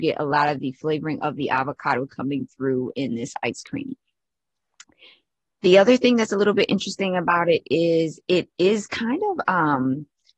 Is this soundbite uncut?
yes; 0 cuts

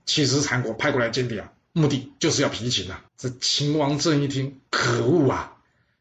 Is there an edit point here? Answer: yes; 2 cuts; at 3.1 s, 4.6 s

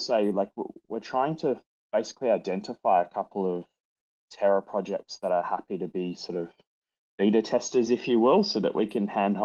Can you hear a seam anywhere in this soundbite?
no; 0 cuts

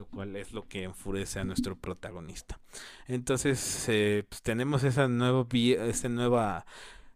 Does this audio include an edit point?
no; 0 cuts

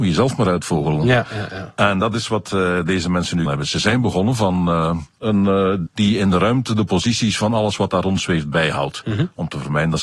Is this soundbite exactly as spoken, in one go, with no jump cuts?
no; 2 cuts; at 3.5 s, 5.9 s

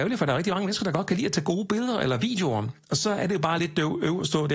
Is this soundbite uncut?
yes; 0 cuts

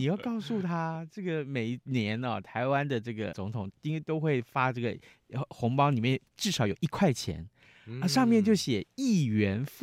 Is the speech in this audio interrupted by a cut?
yes; 2 cuts; at 3.3 s, 6.3 s

